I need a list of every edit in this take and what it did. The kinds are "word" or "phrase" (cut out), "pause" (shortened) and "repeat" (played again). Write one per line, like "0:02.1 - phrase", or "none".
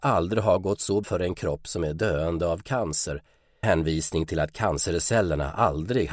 0:01.0 - word
0:03.6 - word